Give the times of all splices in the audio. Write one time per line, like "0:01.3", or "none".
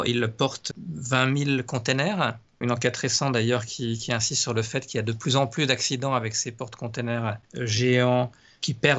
0:07.4